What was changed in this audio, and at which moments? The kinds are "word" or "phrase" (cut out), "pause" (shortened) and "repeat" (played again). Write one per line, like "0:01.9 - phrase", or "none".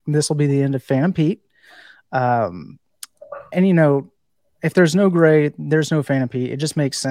0:03.5 - word